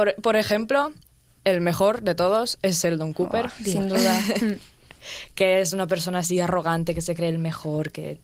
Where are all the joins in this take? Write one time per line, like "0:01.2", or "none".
none